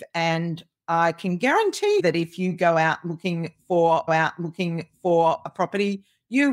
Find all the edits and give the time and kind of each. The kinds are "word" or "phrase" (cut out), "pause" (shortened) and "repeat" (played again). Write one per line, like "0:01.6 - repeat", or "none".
0:02.0 - word
0:04.1 - repeat